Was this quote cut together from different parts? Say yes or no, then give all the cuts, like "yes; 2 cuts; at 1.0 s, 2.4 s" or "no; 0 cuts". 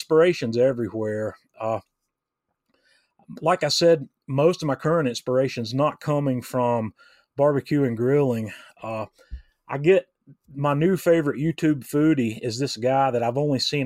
no; 0 cuts